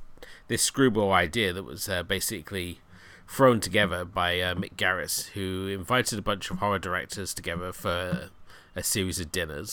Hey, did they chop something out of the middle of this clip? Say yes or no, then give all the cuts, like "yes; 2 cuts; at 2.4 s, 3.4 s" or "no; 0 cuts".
no; 0 cuts